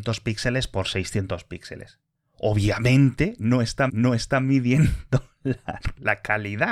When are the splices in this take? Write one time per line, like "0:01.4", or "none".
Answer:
0:03.9